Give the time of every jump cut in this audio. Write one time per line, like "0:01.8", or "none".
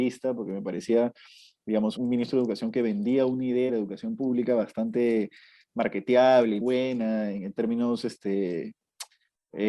0:02.0
0:03.7
0:06.6

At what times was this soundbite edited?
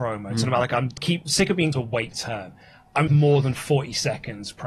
0:01.0
0:01.7
0:02.1
0:03.1

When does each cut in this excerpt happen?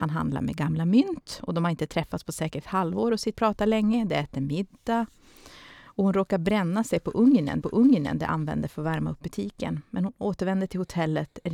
0:03.3
0:07.6

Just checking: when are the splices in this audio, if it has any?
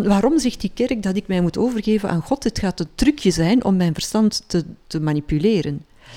none

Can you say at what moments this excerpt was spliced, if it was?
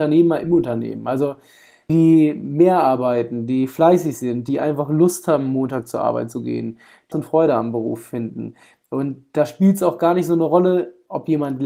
0:01.9
0:07.1

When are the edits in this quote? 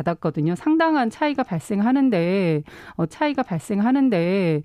0:03.1

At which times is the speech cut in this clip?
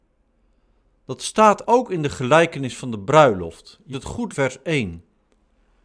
0:01.6
0:03.9
0:04.3

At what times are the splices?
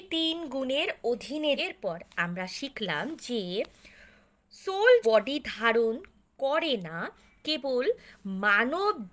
0:01.6
0:05.0

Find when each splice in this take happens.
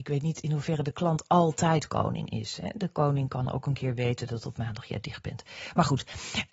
none

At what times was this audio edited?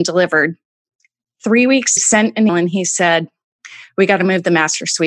0:02.0
0:02.5

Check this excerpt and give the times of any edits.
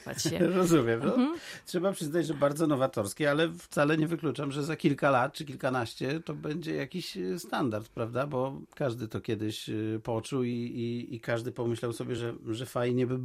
none

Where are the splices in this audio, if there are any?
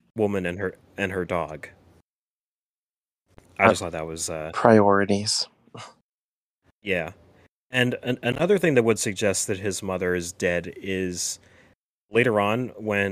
none

